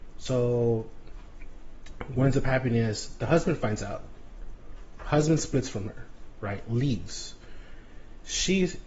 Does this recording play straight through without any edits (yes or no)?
yes